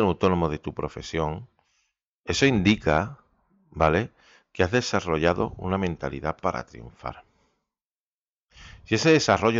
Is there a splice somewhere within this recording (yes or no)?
no